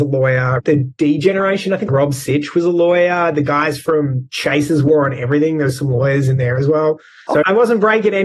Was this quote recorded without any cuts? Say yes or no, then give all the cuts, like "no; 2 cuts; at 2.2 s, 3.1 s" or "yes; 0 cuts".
yes; 0 cuts